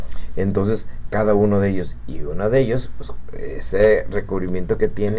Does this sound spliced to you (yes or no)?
no